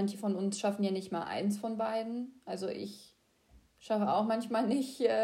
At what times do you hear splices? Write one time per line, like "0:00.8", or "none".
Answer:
none

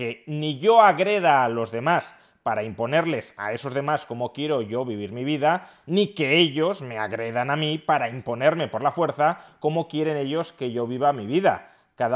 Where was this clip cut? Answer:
none

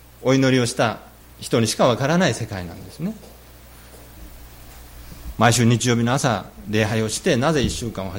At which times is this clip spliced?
0:01.2

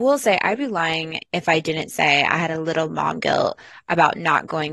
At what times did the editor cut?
none

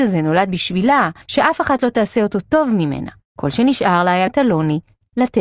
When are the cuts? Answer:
0:01.2
0:03.3
0:04.3

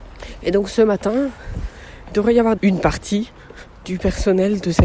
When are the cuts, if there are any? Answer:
0:02.1
0:02.6

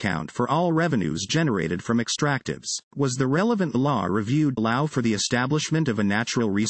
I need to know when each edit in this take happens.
0:02.8
0:04.6

